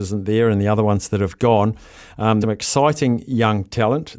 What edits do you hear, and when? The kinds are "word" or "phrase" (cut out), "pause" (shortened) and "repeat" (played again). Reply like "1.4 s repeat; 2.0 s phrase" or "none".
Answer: 2.4 s word